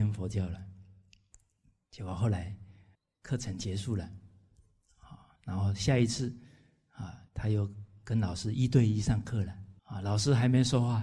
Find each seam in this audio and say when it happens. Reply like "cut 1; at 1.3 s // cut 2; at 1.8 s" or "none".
cut 1; at 2.9 s // cut 2; at 5.4 s // cut 3; at 7.3 s // cut 4; at 9.8 s